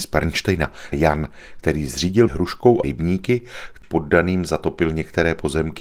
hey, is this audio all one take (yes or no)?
no